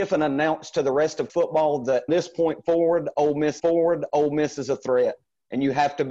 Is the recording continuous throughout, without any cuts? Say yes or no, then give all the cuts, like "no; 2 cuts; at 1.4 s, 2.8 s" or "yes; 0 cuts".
no; 3 cuts; at 1.3 s, 2.1 s, 3.6 s